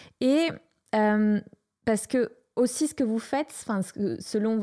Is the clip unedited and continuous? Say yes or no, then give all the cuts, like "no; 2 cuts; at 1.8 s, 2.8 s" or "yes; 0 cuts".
yes; 0 cuts